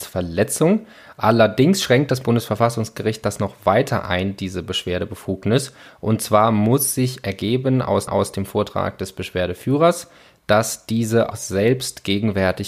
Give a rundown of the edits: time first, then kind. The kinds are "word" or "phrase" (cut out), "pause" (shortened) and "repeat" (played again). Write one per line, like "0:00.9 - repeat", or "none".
0:08.1 - repeat
0:11.3 - word